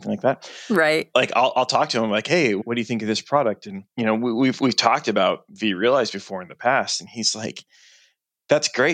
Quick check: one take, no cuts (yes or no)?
no